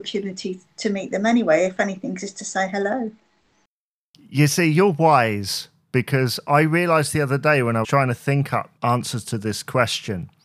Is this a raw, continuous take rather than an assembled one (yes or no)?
no